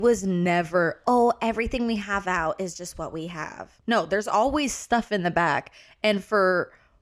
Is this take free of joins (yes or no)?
no